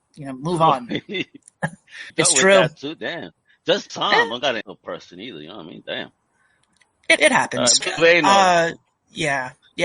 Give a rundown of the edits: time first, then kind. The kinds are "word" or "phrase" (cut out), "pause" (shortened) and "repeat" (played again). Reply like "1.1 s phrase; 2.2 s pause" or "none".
2.1 s word; 3.9 s word; 4.6 s word; 7.2 s word; 7.8 s word